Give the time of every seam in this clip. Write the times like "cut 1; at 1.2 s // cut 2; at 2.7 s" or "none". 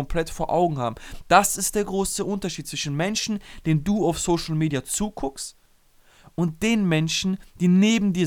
none